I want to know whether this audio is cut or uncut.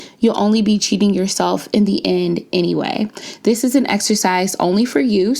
uncut